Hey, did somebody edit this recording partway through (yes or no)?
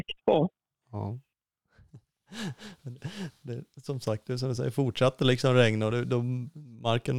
no